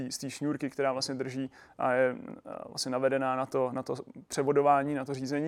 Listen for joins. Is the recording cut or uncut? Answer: uncut